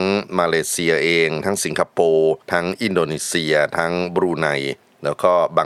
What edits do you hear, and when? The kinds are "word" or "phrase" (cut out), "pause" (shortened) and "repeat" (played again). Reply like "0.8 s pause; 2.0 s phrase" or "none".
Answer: 2.4 s pause